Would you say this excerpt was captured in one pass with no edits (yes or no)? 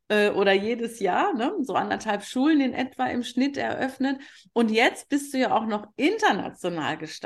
yes